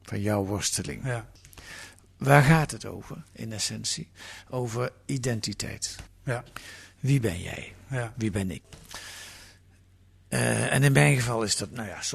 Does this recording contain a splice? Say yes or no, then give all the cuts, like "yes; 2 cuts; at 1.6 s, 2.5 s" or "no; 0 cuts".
no; 0 cuts